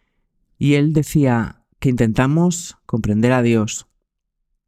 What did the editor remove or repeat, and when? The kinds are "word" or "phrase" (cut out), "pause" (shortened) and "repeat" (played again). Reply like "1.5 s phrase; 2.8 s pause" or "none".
1.7 s pause